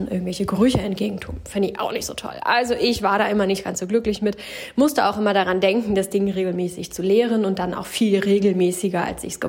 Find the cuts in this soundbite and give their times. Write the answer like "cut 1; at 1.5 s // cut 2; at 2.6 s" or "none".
none